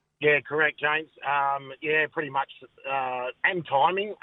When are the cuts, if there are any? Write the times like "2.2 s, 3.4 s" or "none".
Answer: none